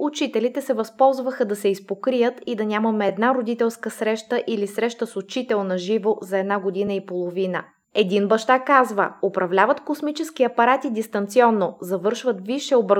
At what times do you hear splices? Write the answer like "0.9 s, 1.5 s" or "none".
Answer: none